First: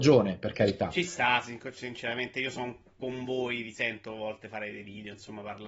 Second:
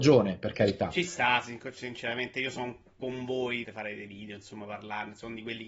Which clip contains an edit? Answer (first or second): second